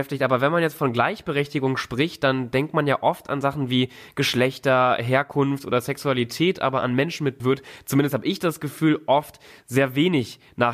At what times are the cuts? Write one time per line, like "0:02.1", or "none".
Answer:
0:07.4